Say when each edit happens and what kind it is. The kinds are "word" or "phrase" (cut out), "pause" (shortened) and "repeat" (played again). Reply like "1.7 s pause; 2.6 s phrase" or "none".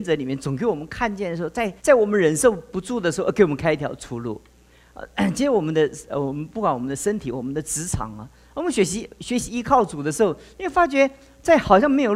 1.8 s pause